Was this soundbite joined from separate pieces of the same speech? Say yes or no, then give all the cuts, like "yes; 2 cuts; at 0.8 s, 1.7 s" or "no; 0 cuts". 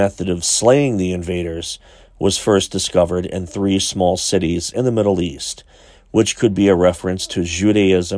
no; 0 cuts